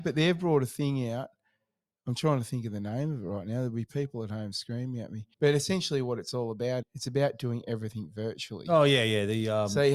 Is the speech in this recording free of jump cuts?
no; 2 cuts; at 5.3 s, 6.8 s

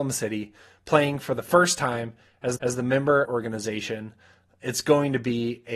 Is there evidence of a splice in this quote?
yes; 2 cuts; at 2.6 s, 3.2 s

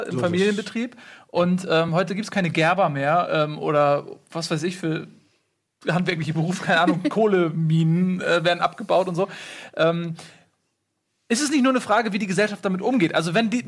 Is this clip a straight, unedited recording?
yes; 0 cuts

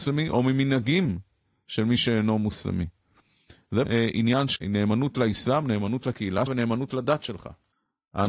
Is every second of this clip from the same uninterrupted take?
no; 3 cuts; at 3.8 s, 4.6 s, 6.5 s

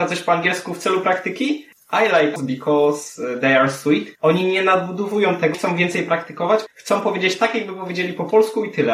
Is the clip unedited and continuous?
no; 5 cuts; at 1.7 s, 2.4 s, 4.1 s, 5.5 s, 6.7 s

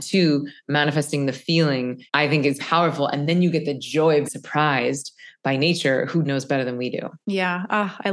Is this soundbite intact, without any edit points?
no; 5 cuts; at 2.1 s, 2.6 s, 4.2 s, 6.2 s, 7.2 s

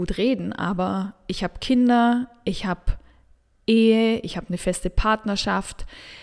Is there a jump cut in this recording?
no; 0 cuts

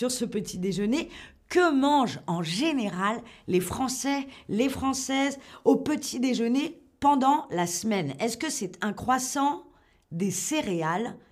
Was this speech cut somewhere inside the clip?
no; 0 cuts

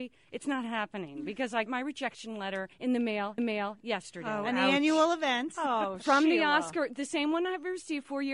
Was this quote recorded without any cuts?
no; 3 cuts; at 1.7 s, 2.7 s, 3.4 s

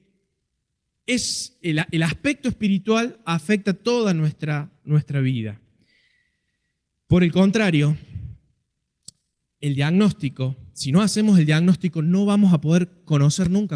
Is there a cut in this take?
yes; 2 cuts; at 1.6 s, 4.8 s

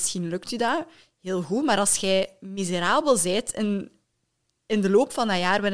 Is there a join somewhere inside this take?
no; 0 cuts

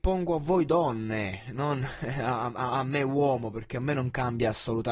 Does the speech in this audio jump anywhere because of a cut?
no; 0 cuts

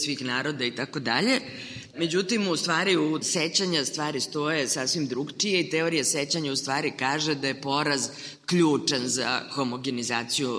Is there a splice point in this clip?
yes; 1 cut; at 3.2 s

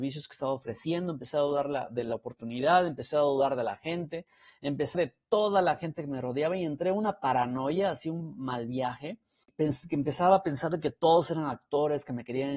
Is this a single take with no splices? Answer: no; 1 cut; at 4.9 s

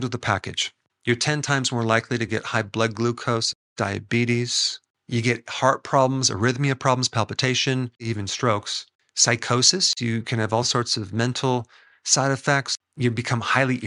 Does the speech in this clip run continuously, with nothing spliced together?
yes; 0 cuts

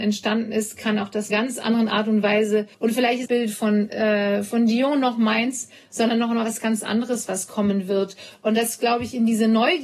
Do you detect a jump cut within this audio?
yes; 3 cuts; at 1.3 s, 2.7 s, 3.3 s

